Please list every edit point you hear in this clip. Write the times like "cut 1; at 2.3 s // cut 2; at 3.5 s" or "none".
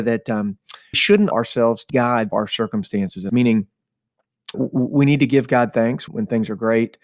cut 1; at 0.9 s // cut 2; at 1.3 s // cut 3; at 1.9 s // cut 4; at 2.3 s // cut 5; at 3.3 s // cut 6; at 4.5 s // cut 7; at 6.1 s